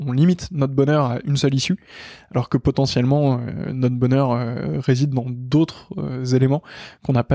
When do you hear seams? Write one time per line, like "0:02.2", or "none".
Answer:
none

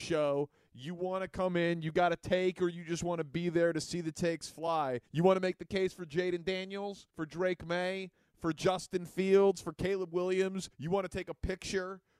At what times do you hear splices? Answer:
0:05.1
0:07.1
0:10.7

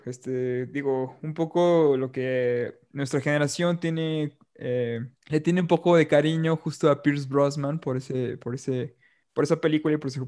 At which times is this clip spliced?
0:05.2

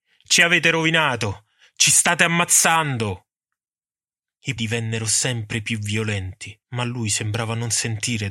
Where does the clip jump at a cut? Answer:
0:04.6
0:06.6

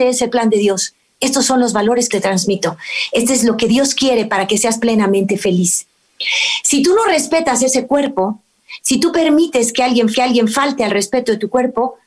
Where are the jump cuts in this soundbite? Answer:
0:02.1
0:10.1

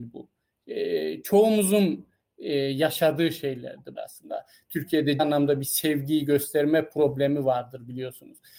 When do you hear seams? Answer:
0:04.0
0:05.2

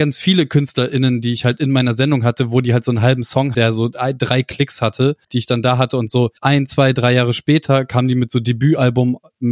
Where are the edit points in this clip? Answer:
0:03.5
0:05.2
0:06.4

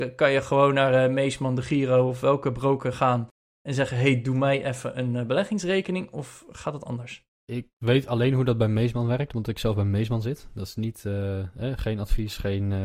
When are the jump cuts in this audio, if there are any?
none

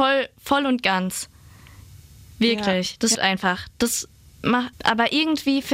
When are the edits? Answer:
0:03.1
0:04.7

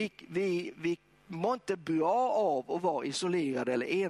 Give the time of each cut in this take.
none

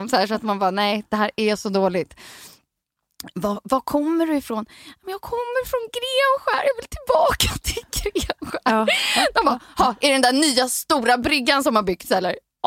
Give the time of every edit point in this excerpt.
none

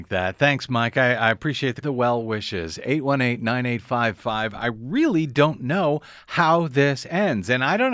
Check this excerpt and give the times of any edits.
0:01.8
0:04.2

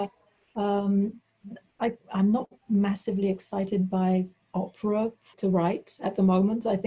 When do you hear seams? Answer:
0:02.6
0:05.3

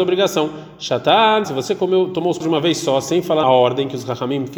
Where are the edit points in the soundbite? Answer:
0:01.4
0:02.4
0:03.4

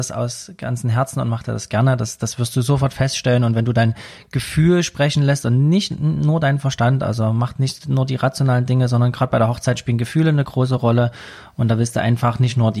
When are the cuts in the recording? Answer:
none

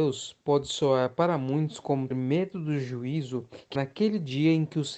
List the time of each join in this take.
0:02.1
0:03.8

